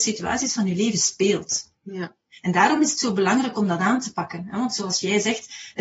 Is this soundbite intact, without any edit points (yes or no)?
yes